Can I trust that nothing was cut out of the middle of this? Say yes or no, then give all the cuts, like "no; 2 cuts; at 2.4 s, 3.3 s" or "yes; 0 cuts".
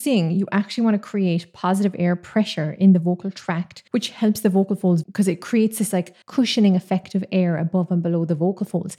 no; 3 cuts; at 3.9 s, 5.0 s, 6.2 s